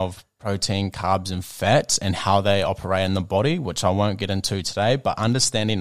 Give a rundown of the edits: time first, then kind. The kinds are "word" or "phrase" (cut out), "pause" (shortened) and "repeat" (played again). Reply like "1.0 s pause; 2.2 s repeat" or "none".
none